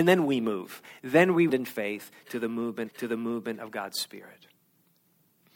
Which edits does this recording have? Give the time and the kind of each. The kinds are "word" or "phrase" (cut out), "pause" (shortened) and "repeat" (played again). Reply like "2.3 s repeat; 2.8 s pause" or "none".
1.5 s word; 2.9 s repeat